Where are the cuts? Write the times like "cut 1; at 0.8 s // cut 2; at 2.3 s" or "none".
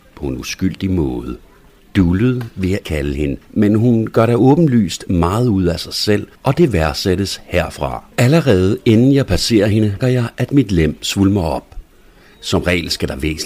cut 1; at 1.8 s // cut 2; at 2.8 s // cut 3; at 3.4 s // cut 4; at 6.4 s // cut 5; at 8.1 s // cut 6; at 10.0 s